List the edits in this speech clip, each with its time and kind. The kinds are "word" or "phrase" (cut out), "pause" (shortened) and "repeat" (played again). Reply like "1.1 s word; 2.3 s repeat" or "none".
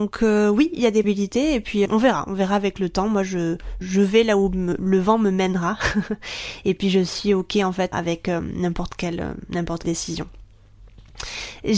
1.0 s word; 1.8 s word; 3.8 s word; 7.9 s word; 9.8 s word